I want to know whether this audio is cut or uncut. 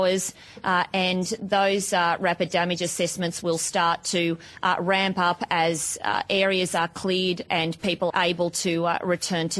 cut